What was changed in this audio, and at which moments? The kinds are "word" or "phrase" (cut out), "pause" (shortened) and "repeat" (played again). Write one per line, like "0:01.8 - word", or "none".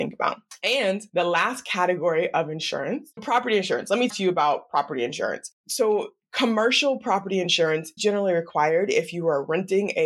0:03.2 - word
0:04.1 - word
0:08.0 - word